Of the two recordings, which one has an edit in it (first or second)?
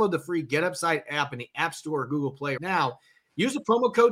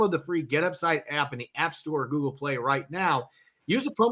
first